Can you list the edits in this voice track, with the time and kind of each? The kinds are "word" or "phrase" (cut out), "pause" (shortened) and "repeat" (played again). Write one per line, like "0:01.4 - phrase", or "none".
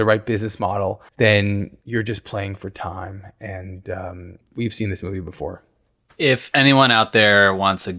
0:01.1 - pause